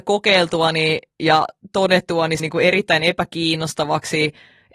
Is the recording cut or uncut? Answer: cut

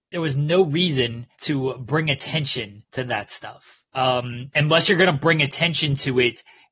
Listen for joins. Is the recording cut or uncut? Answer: cut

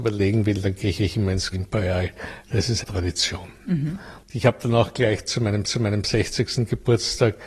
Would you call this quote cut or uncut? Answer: cut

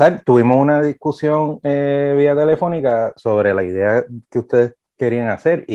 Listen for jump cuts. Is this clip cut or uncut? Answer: uncut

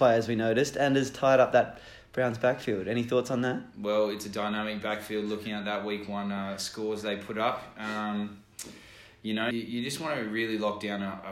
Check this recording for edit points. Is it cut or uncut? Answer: cut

